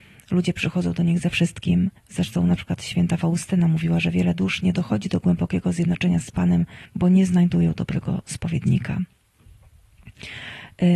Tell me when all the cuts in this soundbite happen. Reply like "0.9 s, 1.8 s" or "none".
2.0 s, 6.8 s